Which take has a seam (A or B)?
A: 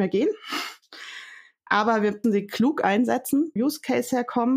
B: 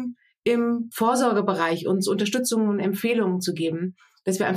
A